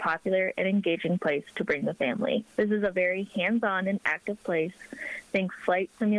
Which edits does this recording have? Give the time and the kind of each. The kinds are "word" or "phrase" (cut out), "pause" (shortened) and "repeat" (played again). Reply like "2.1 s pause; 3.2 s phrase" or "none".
2.5 s pause